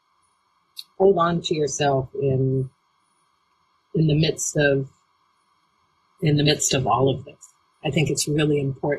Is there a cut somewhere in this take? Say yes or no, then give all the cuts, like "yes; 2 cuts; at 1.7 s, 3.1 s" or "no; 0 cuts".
no; 0 cuts